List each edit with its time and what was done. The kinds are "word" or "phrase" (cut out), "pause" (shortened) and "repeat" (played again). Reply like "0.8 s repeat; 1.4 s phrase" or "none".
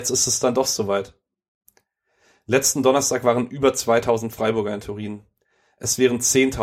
none